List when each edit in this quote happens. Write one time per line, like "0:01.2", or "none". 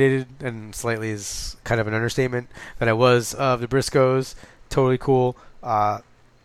none